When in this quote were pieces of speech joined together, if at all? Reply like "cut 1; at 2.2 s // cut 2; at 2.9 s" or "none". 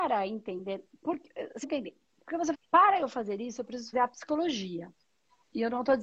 cut 1; at 1.6 s // cut 2; at 2.5 s // cut 3; at 3.9 s